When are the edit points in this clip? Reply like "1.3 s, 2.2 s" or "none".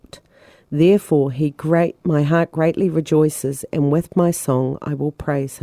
none